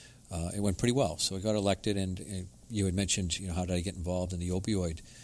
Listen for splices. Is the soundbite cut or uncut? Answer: uncut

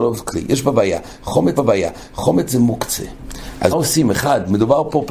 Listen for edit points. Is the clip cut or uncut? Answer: cut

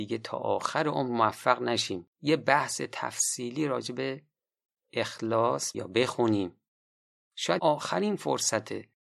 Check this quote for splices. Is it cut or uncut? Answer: cut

